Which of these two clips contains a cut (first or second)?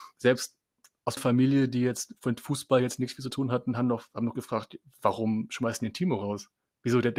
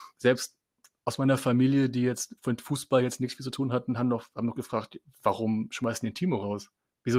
first